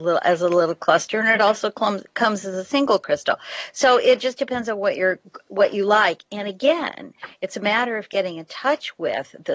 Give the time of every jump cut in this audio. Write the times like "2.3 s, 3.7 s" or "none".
none